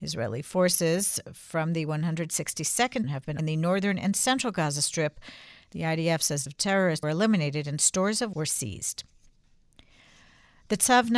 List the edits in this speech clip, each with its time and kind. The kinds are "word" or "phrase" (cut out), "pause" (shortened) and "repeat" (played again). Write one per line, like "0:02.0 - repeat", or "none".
0:03.0 - word
0:03.4 - word
0:06.5 - word
0:07.0 - word
0:08.3 - word